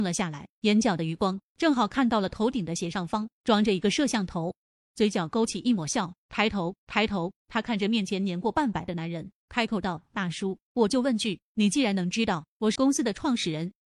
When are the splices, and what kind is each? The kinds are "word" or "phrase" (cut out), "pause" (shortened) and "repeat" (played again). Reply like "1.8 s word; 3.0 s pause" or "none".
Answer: 4.7 s pause; 6.8 s repeat; 12.8 s word